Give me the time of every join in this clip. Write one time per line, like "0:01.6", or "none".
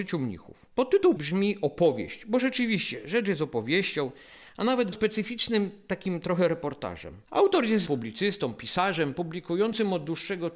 0:01.2
0:04.9
0:07.3
0:07.9